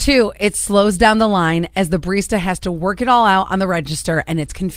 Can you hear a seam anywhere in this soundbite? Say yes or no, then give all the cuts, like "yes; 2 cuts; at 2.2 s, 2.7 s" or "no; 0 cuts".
no; 0 cuts